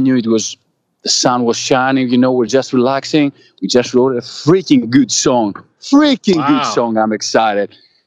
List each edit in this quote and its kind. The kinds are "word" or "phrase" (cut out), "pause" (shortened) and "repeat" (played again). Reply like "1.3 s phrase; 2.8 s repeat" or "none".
none